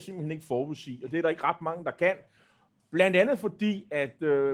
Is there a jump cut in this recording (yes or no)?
no